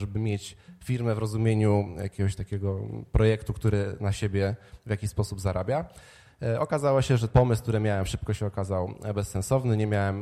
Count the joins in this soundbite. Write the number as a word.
one